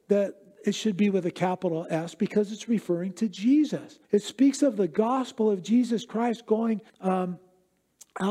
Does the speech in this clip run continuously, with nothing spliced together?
no; 2 cuts; at 4.0 s, 6.9 s

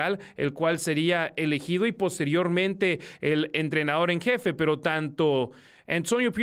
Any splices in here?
no; 0 cuts

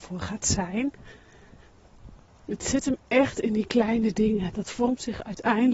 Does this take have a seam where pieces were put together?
no; 0 cuts

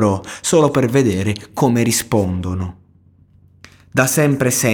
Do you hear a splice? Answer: no; 0 cuts

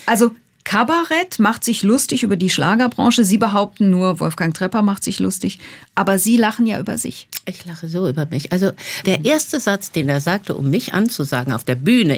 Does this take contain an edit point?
no; 0 cuts

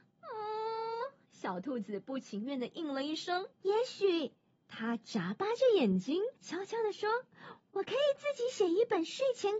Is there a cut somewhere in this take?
yes; 2 cuts; at 3.5 s, 6.4 s

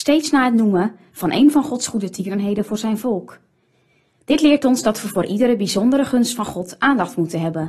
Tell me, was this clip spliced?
no; 0 cuts

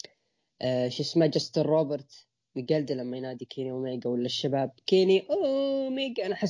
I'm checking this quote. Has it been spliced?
no; 0 cuts

